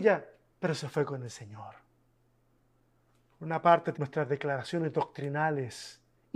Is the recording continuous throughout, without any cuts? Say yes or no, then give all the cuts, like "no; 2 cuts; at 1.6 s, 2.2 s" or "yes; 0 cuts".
no; 1 cut; at 3.9 s